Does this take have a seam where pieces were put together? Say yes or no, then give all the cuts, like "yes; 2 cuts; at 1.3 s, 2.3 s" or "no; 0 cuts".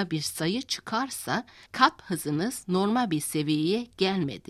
no; 0 cuts